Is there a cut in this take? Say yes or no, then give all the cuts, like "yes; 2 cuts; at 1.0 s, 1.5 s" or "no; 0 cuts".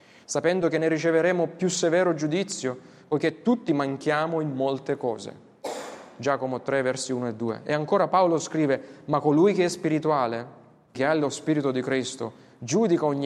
yes; 1 cut; at 10.9 s